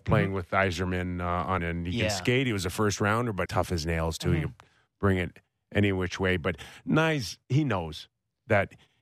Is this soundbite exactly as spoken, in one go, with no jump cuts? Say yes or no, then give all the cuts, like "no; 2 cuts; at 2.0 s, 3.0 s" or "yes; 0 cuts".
no; 2 cuts; at 1.6 s, 3.5 s